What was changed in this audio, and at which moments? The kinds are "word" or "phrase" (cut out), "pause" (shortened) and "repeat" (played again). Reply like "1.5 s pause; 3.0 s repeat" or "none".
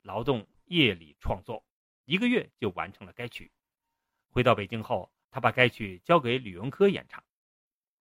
5.2 s pause